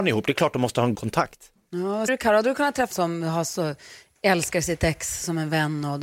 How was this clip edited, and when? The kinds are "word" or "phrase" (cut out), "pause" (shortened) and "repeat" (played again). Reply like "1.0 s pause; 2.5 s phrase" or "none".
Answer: 0.9 s word; 2.1 s word; 2.9 s word